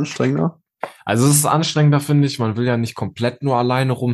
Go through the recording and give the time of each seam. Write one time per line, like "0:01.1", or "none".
none